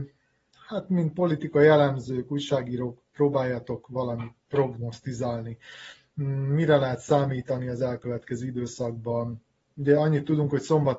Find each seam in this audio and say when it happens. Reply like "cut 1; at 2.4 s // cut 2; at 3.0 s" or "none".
none